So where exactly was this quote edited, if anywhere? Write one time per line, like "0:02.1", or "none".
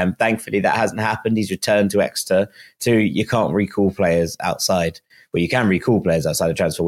none